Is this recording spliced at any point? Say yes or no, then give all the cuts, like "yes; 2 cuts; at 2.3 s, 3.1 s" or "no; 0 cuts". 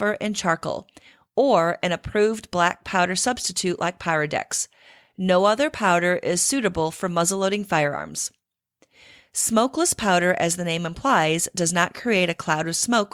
no; 0 cuts